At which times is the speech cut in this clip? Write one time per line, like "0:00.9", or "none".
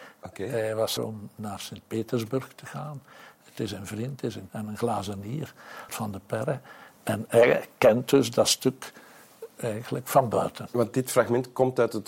0:01.0
0:04.5
0:05.9